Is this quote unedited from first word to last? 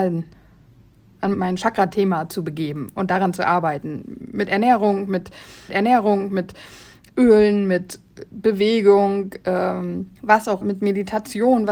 no; 4 cuts; at 1.3 s, 5.7 s, 10.2 s, 10.6 s

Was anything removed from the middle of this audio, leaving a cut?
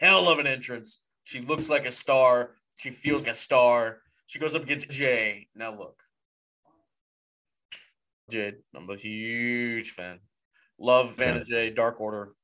yes; 4 cuts; at 3.2 s, 4.9 s, 8.3 s, 11.2 s

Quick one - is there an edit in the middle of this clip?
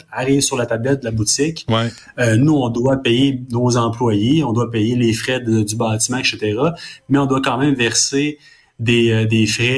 no; 0 cuts

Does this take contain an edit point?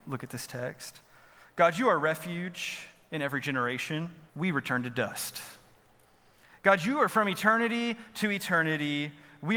yes; 1 cut; at 4.3 s

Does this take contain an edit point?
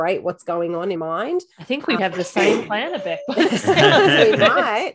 yes; 3 cuts; at 1.0 s, 1.5 s, 2.0 s

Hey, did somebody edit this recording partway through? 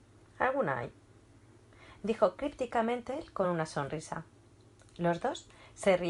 no; 0 cuts

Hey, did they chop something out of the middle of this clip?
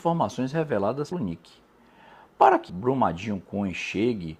yes; 2 cuts; at 1.1 s, 2.7 s

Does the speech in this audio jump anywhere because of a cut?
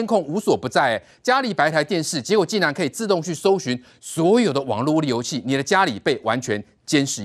no; 0 cuts

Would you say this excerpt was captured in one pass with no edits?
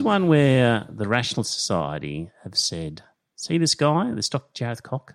yes; 0 cuts

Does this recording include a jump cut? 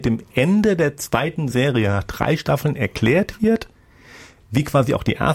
no; 0 cuts

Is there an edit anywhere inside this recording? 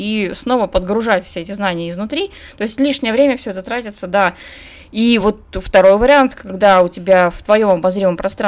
no; 0 cuts

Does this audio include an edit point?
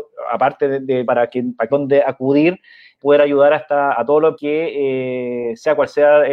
yes; 5 cuts; at 1.0 s, 1.7 s, 3.0 s, 3.9 s, 4.4 s

